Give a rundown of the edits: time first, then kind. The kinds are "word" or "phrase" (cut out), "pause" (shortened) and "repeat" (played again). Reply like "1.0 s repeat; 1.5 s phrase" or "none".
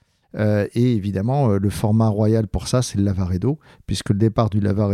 none